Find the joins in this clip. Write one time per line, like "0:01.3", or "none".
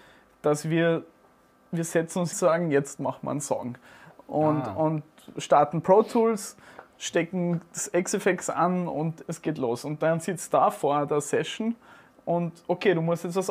0:02.3